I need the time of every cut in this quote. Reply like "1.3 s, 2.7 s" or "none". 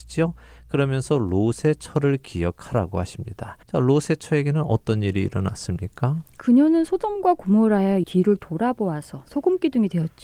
3.6 s, 8.0 s